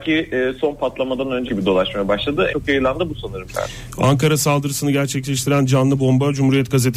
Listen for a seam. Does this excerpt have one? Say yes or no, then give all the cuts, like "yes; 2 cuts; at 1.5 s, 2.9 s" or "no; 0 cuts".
yes; 3 cuts; at 1.5 s, 2.5 s, 3.5 s